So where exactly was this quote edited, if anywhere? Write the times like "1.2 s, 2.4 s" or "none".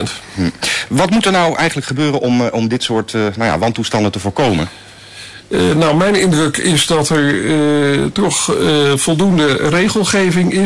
none